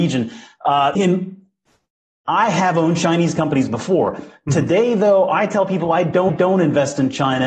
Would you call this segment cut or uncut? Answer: cut